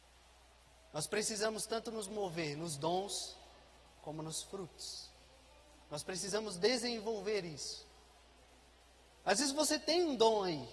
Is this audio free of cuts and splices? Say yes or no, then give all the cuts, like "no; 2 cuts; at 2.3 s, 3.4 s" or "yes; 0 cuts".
yes; 0 cuts